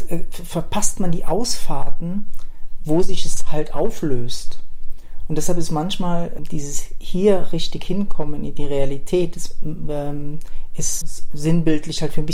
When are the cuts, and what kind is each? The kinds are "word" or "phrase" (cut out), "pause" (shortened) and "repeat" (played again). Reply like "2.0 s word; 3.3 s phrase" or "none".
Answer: 6.4 s word; 11.0 s word